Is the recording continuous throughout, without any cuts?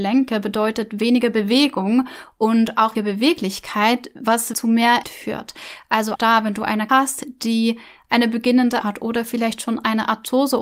no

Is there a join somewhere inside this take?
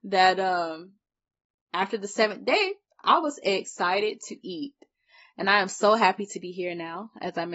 no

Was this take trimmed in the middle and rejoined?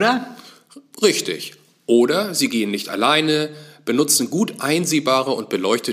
no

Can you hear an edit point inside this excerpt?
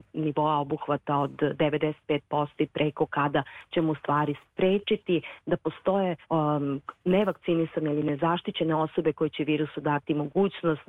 yes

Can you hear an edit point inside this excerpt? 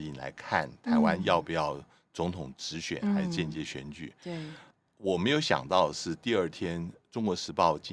no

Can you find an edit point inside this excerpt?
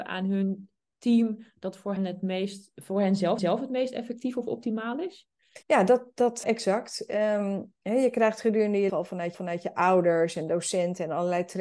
yes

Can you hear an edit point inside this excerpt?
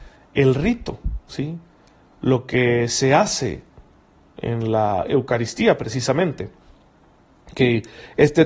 no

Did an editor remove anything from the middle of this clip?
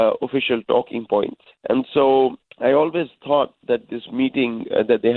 yes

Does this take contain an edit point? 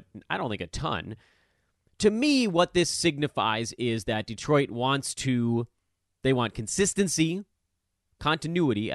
no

